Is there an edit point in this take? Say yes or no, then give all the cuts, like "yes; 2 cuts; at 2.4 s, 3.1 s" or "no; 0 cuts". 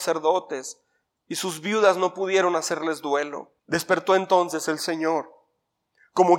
yes; 1 cut; at 3.6 s